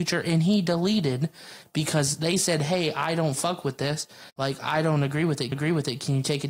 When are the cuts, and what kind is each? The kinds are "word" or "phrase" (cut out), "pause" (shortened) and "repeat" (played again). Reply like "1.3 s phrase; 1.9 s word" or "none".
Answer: 4.3 s pause; 5.5 s repeat